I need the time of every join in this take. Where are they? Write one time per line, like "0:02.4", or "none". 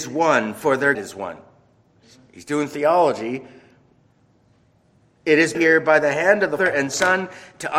0:00.9
0:05.5
0:06.6